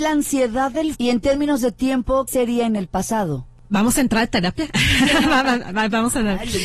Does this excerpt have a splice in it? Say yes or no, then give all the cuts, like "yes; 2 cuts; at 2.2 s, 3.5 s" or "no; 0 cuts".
yes; 2 cuts; at 0.9 s, 2.3 s